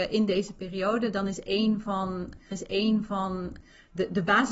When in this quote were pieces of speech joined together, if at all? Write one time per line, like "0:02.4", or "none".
0:02.5